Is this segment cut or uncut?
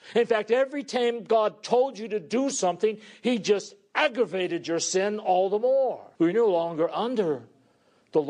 cut